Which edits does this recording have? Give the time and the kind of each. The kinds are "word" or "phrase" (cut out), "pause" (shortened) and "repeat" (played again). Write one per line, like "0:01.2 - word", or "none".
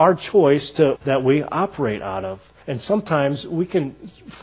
0:00.9 - phrase
0:02.6 - pause